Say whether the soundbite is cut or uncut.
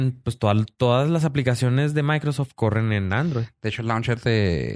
uncut